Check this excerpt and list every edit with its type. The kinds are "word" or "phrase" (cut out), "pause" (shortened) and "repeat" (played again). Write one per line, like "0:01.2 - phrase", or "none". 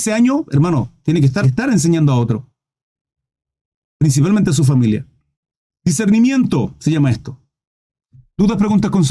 0:01.4 - phrase
0:05.3 - pause